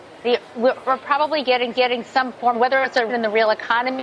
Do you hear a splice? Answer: yes; 3 cuts; at 1.7 s, 2.5 s, 3.1 s

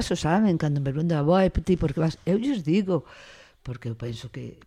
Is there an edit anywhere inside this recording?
no; 0 cuts

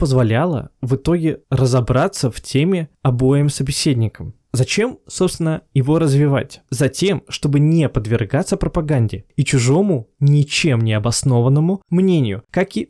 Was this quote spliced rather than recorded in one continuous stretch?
no; 0 cuts

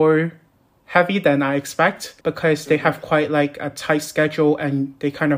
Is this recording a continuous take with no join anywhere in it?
no; 1 cut; at 2.2 s

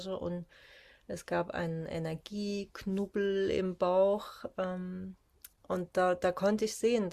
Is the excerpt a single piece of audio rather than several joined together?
yes; 0 cuts

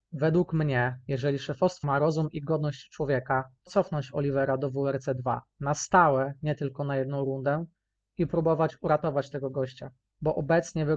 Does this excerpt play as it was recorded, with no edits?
no; 2 cuts; at 1.8 s, 3.7 s

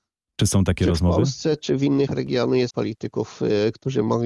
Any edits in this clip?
yes; 2 cuts; at 2.1 s, 2.7 s

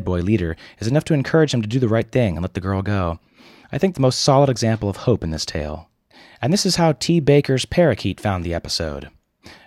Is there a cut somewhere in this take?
yes; 1 cut; at 3.9 s

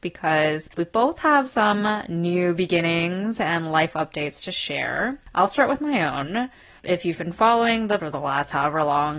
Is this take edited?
yes; 1 cut; at 8.0 s

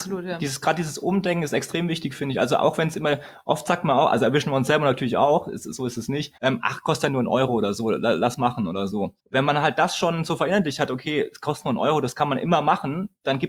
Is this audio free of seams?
no; 2 cuts; at 6.4 s, 9.2 s

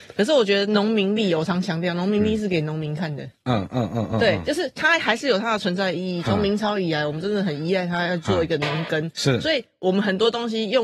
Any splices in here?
no; 0 cuts

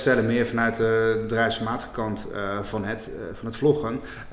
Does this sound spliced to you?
no; 0 cuts

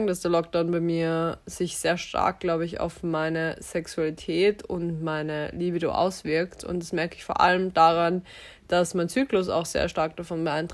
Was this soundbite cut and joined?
no; 0 cuts

